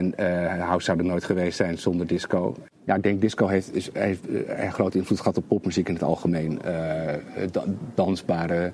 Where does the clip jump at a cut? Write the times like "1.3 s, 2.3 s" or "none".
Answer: none